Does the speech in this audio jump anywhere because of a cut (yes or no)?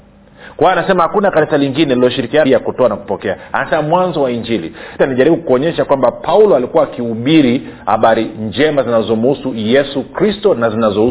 yes